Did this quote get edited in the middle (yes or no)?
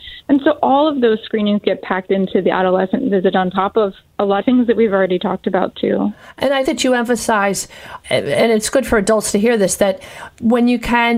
yes